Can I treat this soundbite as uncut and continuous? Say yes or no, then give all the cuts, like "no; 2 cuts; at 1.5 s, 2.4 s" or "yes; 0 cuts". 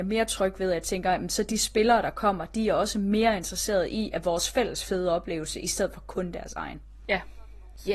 yes; 0 cuts